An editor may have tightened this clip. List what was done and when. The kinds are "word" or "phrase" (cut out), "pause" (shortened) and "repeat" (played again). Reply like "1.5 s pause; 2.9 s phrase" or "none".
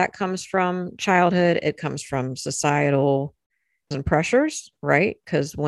3.9 s word